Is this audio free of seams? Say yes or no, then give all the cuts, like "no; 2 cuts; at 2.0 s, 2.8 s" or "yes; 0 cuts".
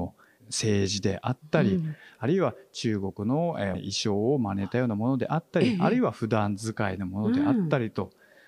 yes; 0 cuts